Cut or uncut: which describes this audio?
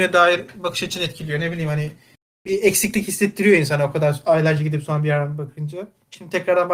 uncut